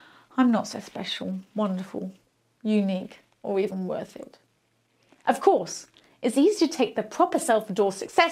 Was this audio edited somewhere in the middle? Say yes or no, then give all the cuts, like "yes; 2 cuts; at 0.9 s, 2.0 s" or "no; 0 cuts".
no; 0 cuts